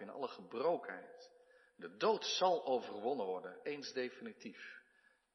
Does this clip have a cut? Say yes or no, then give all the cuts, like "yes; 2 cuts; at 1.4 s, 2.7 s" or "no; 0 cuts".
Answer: no; 0 cuts